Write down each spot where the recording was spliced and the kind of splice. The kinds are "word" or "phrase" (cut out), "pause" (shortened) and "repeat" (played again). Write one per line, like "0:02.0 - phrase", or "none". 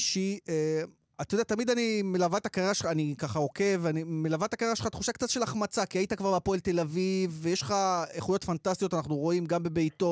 none